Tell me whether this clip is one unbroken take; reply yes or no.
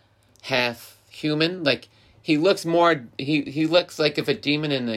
yes